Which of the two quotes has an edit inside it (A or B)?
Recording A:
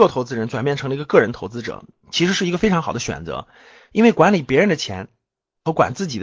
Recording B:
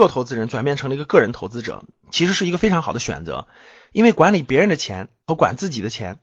B